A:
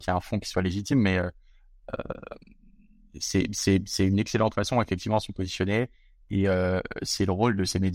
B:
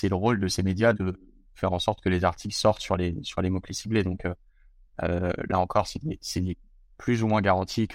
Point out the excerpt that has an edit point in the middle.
B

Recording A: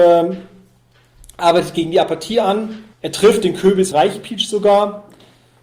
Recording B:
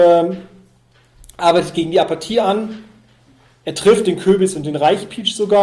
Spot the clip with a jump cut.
A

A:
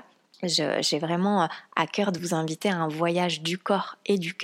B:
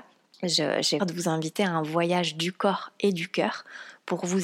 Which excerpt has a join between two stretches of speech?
B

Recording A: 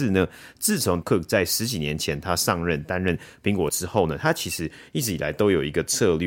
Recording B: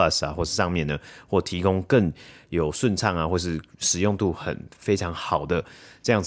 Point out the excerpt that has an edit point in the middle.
A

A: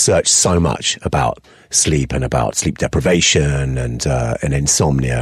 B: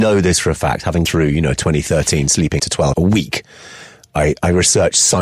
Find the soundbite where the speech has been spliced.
B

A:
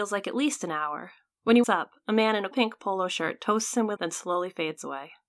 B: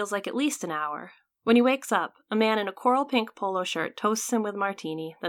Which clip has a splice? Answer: A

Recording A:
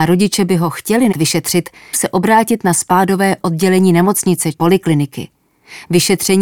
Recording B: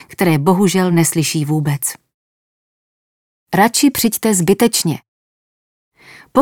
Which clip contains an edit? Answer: A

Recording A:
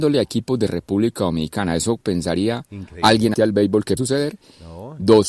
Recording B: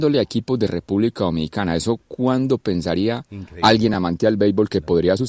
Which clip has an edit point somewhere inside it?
A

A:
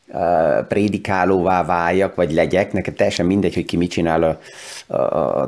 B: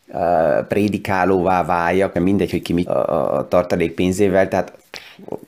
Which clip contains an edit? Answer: B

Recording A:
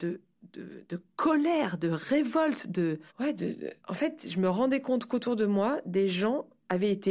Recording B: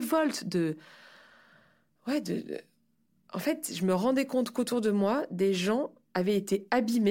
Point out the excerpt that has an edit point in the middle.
A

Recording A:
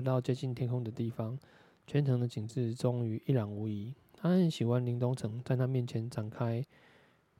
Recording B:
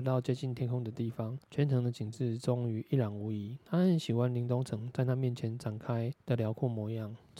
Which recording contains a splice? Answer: B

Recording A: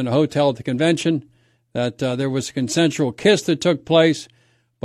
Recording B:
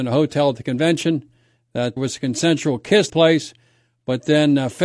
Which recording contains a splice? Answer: B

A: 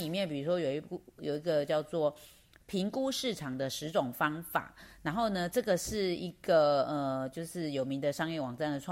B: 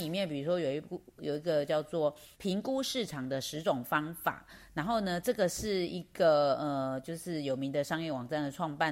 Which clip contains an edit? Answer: B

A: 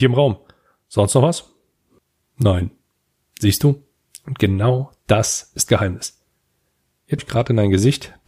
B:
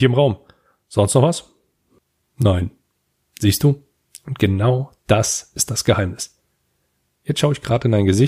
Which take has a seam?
A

